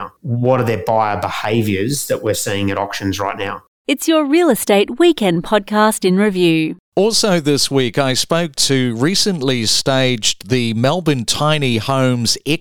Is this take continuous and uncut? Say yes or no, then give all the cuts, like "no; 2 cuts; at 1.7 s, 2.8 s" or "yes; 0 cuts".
no; 1 cut; at 8.6 s